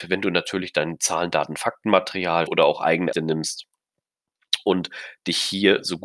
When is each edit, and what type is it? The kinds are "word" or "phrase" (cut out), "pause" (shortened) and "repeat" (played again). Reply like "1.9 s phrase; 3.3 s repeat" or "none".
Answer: 2.5 s word; 3.1 s word